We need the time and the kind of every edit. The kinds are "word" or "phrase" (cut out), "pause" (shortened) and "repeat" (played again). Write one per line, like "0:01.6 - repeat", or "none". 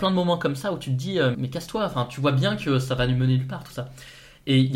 0:01.3 - word